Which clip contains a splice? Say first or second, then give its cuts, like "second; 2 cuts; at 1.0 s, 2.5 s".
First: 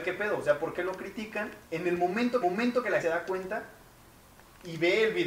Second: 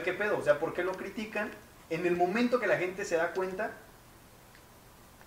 first; 4 cuts; at 1.7 s, 2.4 s, 3.0 s, 4.2 s